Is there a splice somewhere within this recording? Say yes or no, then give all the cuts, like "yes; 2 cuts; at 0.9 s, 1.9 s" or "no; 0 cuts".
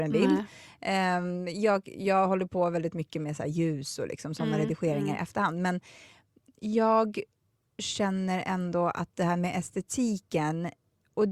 no; 0 cuts